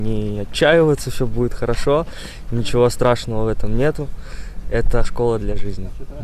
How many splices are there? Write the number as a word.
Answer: one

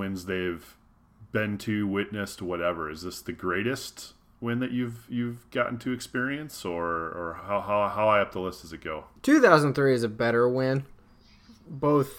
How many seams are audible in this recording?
one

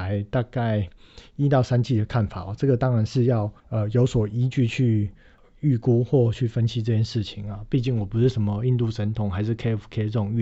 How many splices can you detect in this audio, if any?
one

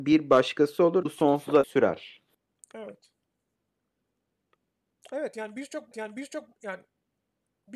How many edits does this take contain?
four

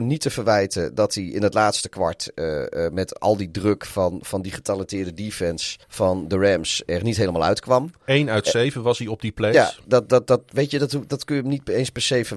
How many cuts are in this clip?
one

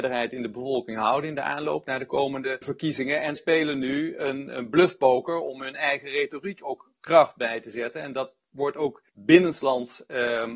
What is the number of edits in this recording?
three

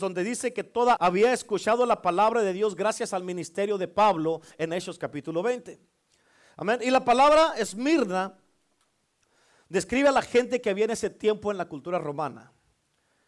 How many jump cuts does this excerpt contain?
one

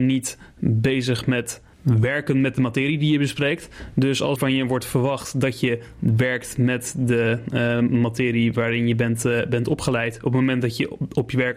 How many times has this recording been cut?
two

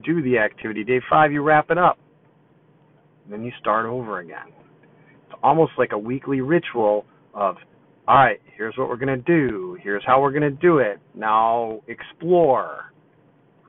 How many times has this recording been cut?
zero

